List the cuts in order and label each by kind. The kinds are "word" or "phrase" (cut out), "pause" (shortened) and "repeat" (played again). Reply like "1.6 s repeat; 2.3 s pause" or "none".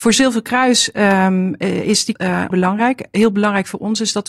2.2 s word; 2.5 s word